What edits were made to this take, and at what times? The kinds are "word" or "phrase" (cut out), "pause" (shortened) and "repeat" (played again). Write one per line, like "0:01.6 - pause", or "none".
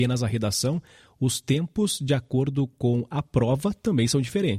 none